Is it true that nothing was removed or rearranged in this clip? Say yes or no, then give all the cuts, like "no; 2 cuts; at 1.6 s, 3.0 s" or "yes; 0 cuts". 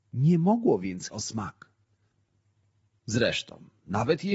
no; 1 cut; at 1.1 s